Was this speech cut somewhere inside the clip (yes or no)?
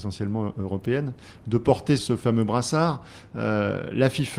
yes